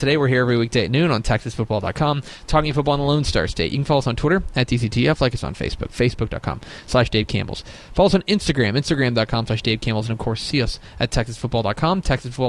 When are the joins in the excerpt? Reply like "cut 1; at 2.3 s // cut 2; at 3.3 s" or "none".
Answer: none